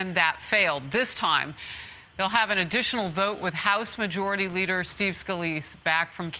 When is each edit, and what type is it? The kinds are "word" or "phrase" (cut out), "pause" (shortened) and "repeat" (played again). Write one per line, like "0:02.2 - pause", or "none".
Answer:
none